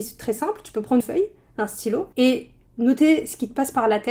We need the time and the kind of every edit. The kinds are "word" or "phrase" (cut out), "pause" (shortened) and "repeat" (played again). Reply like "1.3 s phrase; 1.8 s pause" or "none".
1.0 s word; 2.1 s pause